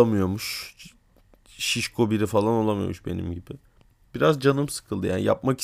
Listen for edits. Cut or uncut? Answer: uncut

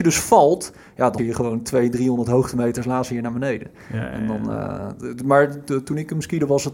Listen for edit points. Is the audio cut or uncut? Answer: cut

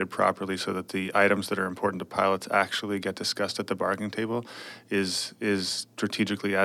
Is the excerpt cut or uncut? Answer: uncut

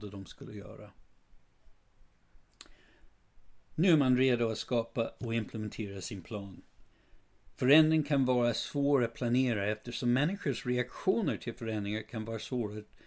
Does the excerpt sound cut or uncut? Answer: uncut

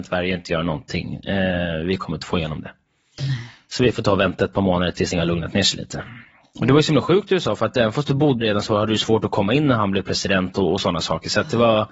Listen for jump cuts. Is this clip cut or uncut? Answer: cut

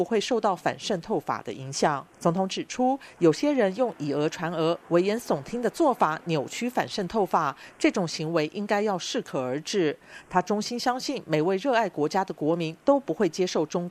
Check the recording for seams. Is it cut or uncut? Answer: cut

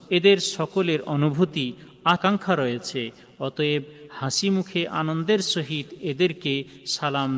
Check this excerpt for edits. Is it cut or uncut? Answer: cut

